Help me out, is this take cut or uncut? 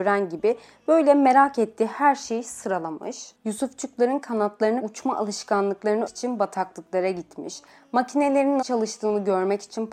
cut